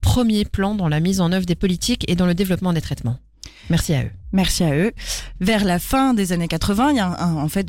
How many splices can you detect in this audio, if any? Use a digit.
0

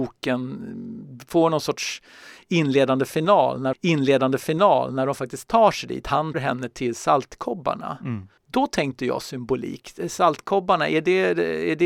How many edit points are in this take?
3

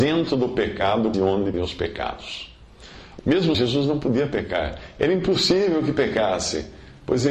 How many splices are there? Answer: 4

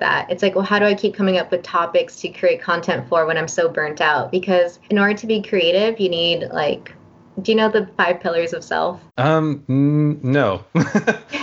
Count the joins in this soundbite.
2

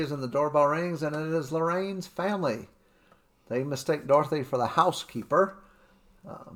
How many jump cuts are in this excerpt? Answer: 0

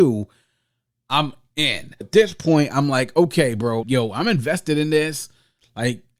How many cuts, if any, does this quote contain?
2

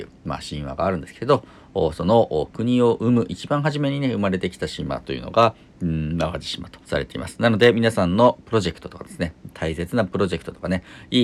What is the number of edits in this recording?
1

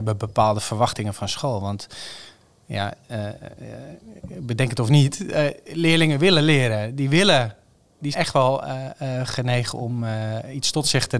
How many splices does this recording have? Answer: 1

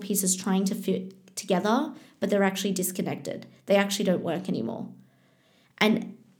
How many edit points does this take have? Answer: 0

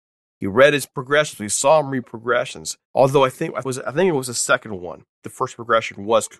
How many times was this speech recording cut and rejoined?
3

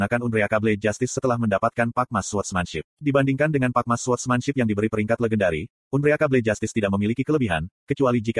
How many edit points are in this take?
1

